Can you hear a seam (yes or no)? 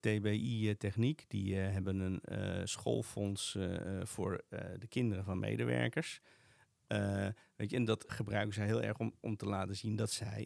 yes